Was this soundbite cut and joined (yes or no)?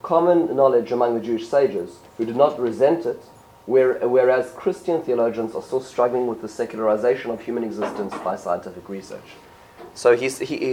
no